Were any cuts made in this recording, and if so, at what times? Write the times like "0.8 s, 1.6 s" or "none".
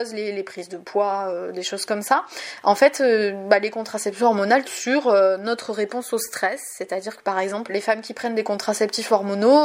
4.6 s, 7.7 s

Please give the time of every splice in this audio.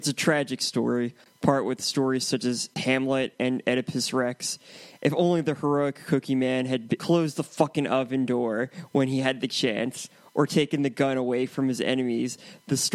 none

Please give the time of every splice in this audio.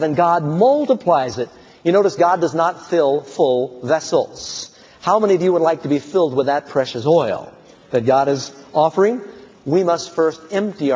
none

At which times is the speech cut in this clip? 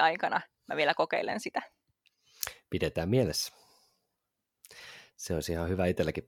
none

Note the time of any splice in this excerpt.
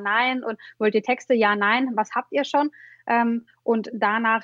none

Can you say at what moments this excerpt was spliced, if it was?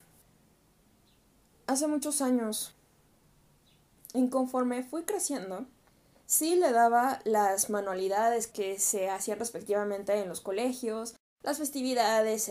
none

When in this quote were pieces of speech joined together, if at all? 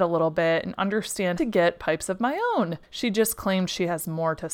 1.4 s, 2.8 s

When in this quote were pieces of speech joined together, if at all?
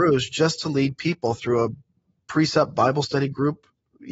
none

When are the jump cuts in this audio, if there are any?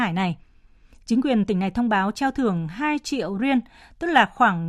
none

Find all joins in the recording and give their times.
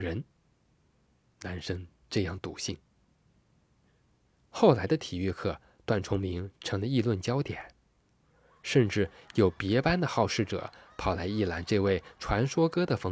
none

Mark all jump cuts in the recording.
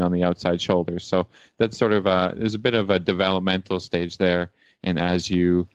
none

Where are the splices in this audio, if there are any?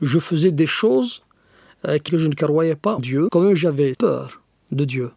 2.1 s, 3.0 s, 3.3 s, 3.9 s

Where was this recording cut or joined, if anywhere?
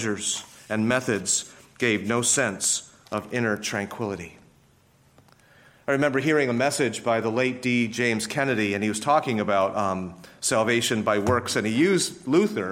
none

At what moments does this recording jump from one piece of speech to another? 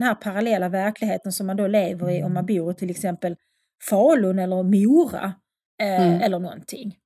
none

